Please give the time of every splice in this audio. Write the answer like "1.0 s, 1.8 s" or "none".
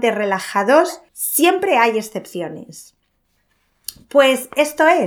1.1 s